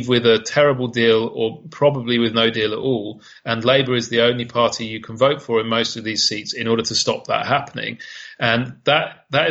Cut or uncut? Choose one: uncut